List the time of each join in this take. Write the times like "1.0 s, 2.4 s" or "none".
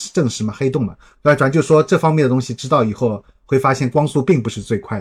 none